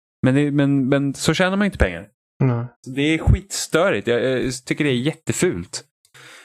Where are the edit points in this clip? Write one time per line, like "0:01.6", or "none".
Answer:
0:02.8

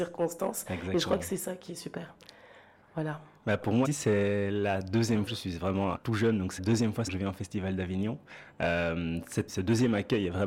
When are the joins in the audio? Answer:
0:03.8
0:05.3
0:05.9
0:06.6
0:07.1
0:09.5

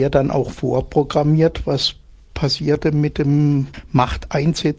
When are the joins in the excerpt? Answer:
none

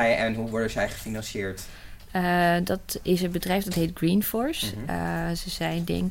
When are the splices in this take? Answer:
none

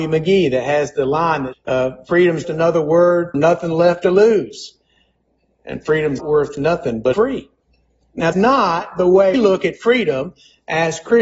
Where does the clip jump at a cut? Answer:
0:01.5
0:02.4
0:03.3
0:06.2
0:07.1
0:08.3
0:09.3

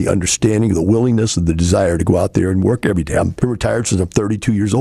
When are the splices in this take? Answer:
0:03.4

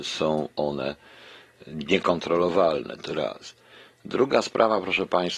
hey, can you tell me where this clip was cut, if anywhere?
0:03.1

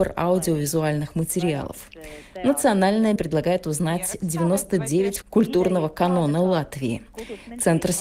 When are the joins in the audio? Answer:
0:03.2
0:05.2

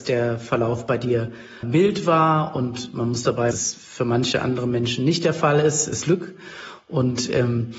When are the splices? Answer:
0:01.6
0:03.5
0:06.0

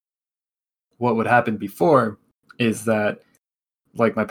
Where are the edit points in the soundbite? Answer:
none

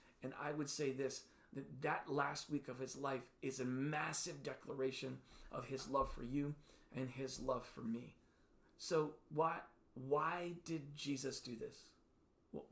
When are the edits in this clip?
none

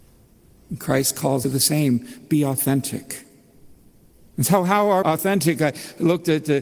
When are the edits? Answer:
0:01.4
0:04.3
0:05.0

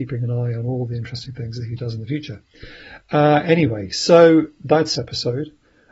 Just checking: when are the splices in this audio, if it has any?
0:05.0

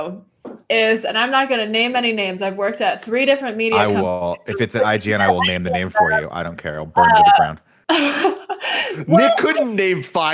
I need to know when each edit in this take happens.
none

